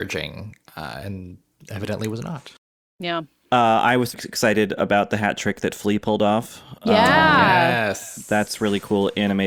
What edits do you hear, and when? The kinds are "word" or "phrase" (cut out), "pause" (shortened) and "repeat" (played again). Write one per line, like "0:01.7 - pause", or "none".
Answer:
0:03.4 - pause
0:04.1 - word